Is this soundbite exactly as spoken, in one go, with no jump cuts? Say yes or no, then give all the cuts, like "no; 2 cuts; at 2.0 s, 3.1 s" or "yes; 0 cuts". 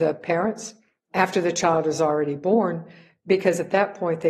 yes; 0 cuts